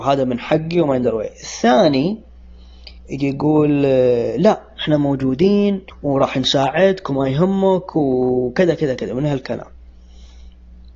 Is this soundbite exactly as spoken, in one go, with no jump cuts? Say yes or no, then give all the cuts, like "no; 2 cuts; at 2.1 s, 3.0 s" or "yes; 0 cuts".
no; 2 cuts; at 3.0 s, 5.9 s